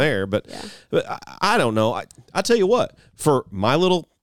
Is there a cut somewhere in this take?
no; 0 cuts

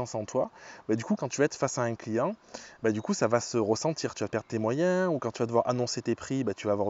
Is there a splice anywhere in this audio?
yes; 2 cuts; at 1.2 s, 4.3 s

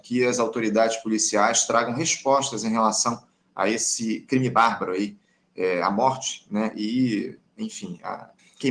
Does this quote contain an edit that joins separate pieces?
no; 0 cuts

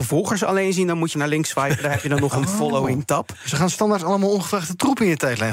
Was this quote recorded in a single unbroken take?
no; 1 cut; at 1.1 s

